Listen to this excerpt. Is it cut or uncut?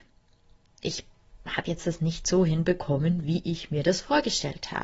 uncut